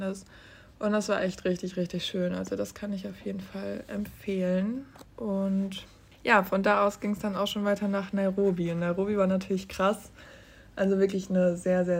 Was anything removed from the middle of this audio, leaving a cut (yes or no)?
no